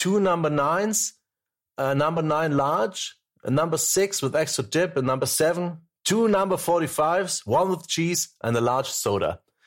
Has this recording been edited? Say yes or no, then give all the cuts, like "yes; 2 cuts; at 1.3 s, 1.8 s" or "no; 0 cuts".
no; 0 cuts